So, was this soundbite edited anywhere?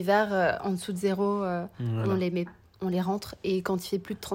no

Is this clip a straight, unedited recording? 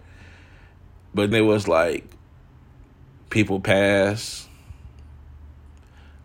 no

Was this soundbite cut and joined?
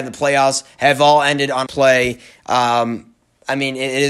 yes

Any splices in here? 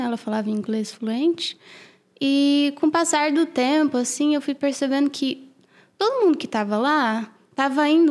no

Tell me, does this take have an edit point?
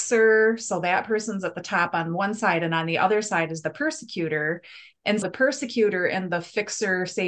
yes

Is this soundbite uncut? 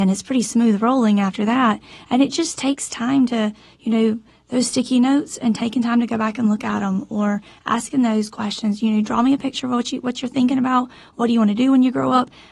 yes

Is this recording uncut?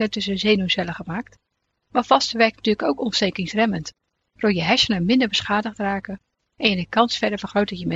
yes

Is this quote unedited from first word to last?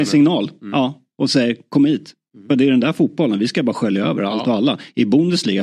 yes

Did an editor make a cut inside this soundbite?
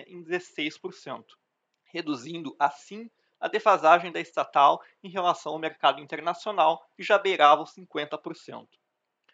no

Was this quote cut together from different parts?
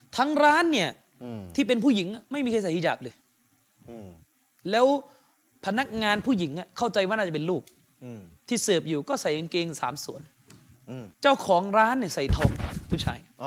yes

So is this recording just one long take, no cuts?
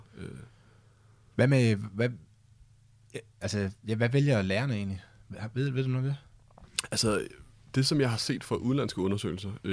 yes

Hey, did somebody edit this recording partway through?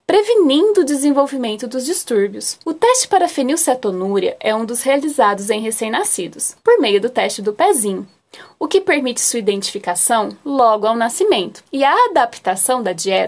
yes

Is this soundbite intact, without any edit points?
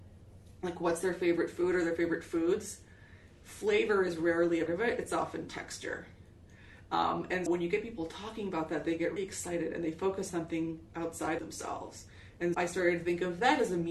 no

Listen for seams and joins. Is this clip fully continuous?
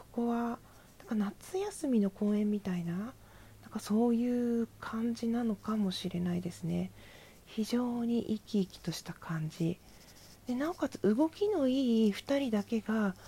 yes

